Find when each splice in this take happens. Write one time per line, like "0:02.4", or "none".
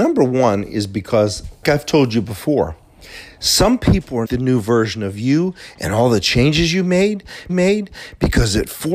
0:01.6
0:04.2
0:07.5